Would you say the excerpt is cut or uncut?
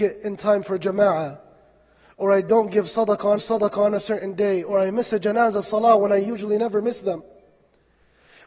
cut